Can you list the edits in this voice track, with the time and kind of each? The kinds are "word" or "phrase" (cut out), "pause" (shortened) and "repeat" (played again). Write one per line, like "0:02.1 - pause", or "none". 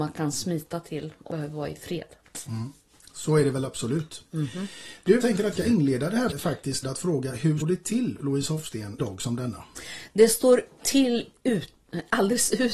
0:01.3 - word
0:05.2 - word
0:05.5 - word
0:06.3 - word
0:06.8 - word
0:07.6 - word
0:08.2 - word
0:09.0 - word
0:10.8 - word